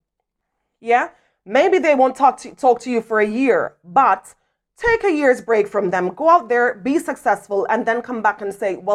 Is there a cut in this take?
no; 0 cuts

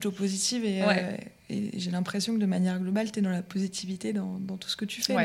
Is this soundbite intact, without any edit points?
yes; 0 cuts

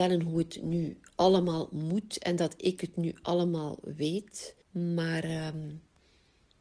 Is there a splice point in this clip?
yes; 1 cut; at 4.6 s

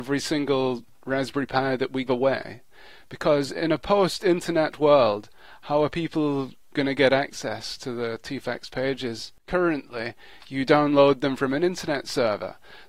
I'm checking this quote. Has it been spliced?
yes; 2 cuts; at 2.1 s, 9.4 s

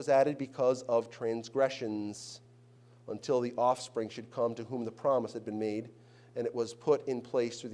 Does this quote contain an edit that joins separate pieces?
no; 0 cuts

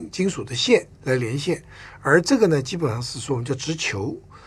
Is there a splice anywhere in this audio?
yes; 1 cut; at 0.9 s

